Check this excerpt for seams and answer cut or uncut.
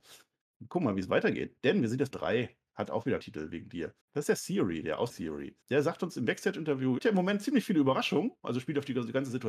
cut